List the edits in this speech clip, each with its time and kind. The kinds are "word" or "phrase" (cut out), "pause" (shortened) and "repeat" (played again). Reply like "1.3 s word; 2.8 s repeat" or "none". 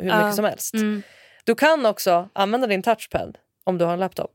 none